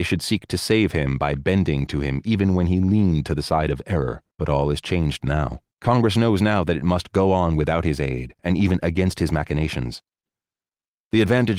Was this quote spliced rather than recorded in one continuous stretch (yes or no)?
yes